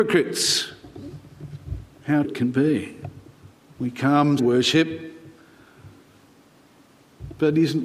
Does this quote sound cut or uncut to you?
cut